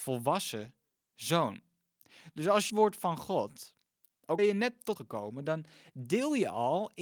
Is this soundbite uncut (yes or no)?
no